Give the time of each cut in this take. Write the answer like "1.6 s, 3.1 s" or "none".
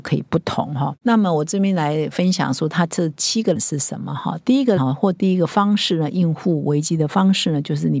3.6 s, 4.8 s

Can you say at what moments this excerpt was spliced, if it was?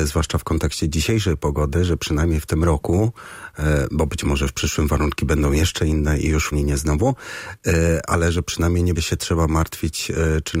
6.5 s, 8.9 s

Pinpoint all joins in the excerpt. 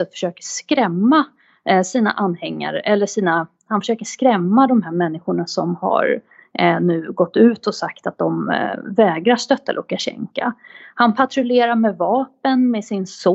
none

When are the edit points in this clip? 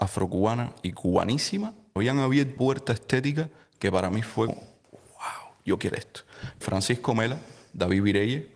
2.0 s, 2.6 s, 4.5 s, 5.9 s, 6.6 s

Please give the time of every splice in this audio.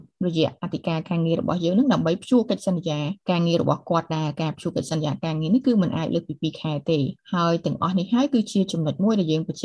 3.2 s, 7.2 s

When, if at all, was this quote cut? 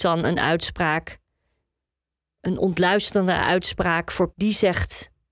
4.3 s

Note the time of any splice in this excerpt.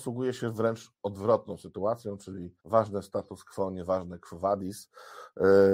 2.6 s

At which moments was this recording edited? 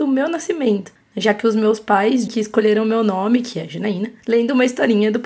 2.3 s

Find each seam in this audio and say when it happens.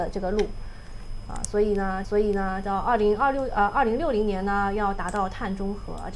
2.0 s

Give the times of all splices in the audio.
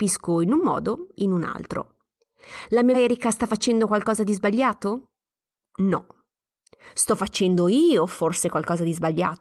1.2 s, 2.9 s

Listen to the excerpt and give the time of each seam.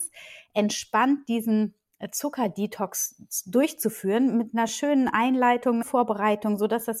5.8 s

